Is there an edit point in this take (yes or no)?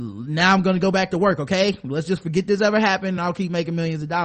no